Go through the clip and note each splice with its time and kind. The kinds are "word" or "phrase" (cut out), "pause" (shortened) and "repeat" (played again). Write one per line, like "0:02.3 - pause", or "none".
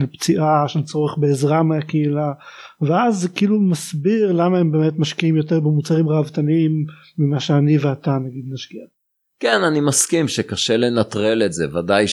none